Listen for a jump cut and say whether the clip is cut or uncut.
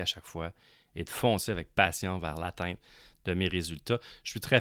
uncut